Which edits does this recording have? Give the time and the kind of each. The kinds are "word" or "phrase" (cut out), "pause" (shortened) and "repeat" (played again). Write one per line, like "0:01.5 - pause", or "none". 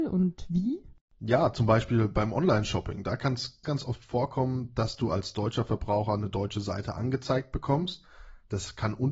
0:03.6 - word